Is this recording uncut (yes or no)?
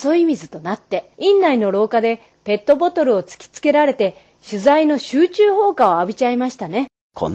no